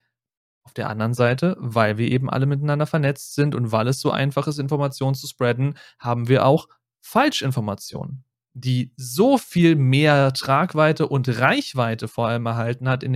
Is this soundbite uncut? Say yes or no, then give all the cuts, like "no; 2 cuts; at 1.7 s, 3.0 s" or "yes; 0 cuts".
yes; 0 cuts